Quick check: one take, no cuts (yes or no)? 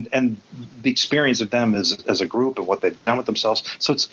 yes